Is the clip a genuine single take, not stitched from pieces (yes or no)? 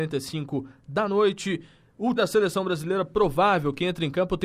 no